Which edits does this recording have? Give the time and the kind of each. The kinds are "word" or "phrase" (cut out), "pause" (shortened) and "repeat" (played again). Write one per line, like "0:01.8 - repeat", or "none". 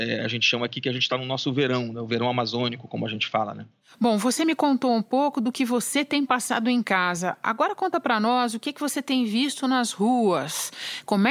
none

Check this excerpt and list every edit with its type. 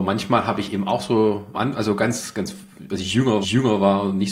0:01.5 - phrase
0:03.4 - repeat

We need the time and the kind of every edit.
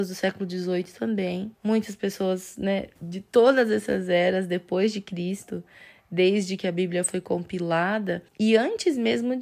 0:01.5 - pause
0:03.0 - pause
0:08.3 - pause

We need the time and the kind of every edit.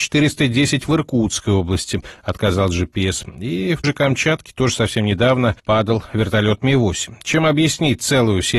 0:03.8 - word
0:05.6 - pause

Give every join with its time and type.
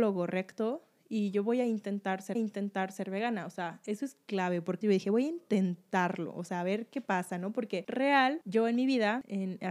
0:02.3 - repeat
0:04.8 - word

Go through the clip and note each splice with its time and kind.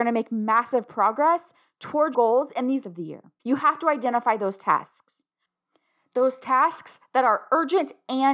0:02.1 - word
0:02.8 - phrase
0:03.4 - pause

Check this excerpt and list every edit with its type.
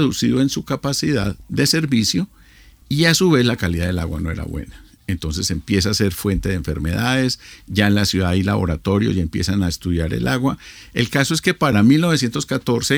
none

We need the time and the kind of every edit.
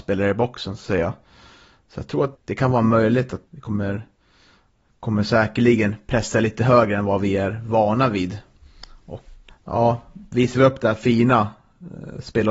0:02.3 - word
0:03.5 - word
0:09.5 - word

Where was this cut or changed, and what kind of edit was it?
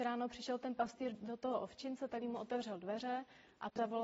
0:01.1 - word
0:02.2 - word

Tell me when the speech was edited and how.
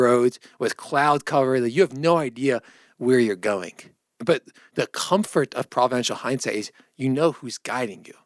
none

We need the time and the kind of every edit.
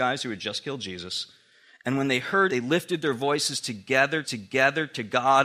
0:02.5 - word
0:04.2 - repeat

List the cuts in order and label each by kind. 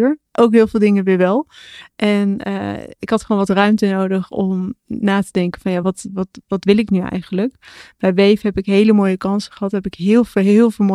none

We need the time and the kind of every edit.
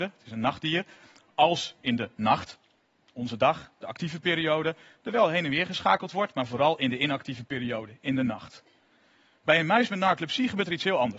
none

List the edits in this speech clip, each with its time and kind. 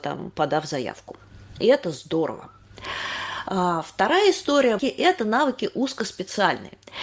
0:04.8 - phrase

